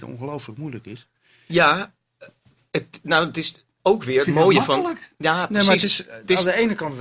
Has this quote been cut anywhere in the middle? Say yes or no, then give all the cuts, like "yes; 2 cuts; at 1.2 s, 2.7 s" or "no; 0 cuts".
no; 0 cuts